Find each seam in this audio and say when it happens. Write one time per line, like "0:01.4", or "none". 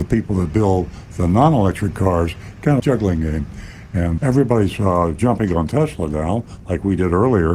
0:02.8
0:04.2